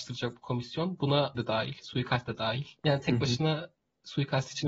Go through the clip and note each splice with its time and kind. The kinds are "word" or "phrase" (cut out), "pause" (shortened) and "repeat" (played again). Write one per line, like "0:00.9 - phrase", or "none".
0:01.3 - word
0:02.8 - pause